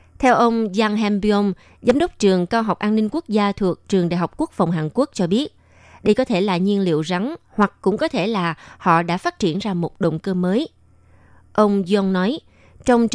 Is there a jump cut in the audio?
no; 0 cuts

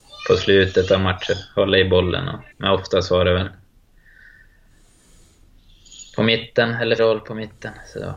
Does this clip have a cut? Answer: yes; 2 cuts; at 2.5 s, 7.0 s

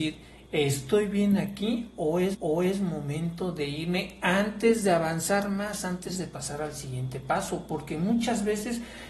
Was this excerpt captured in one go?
no; 1 cut; at 2.3 s

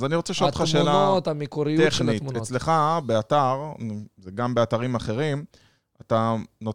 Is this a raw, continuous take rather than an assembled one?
yes; 0 cuts

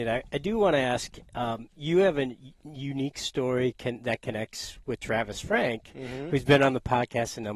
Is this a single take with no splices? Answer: yes; 0 cuts

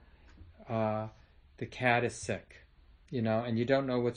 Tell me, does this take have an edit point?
no; 0 cuts

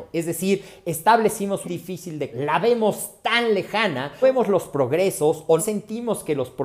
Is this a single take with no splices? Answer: no; 4 cuts; at 1.6 s, 2.3 s, 4.2 s, 5.6 s

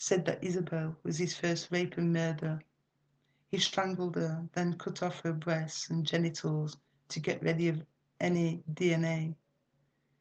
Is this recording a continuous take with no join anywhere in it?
yes; 0 cuts

